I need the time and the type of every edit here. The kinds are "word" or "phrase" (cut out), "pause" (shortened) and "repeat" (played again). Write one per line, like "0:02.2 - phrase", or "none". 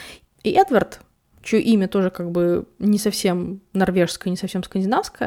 none